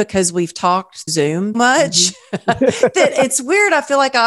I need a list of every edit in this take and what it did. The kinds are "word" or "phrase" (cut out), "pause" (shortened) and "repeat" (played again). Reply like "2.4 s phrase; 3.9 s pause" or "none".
1.1 s word; 1.5 s word